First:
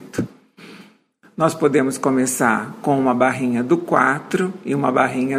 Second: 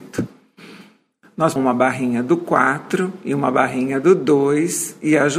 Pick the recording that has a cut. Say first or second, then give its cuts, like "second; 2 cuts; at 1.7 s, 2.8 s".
second; 1 cut; at 1.6 s